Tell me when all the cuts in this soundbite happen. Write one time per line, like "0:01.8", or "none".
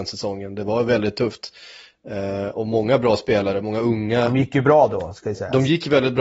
none